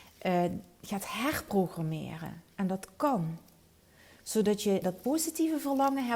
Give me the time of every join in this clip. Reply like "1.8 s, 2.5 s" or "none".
4.8 s